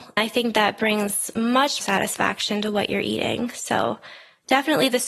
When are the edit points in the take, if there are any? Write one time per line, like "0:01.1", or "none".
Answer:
0:01.8